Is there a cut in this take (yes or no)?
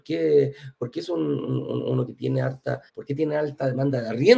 yes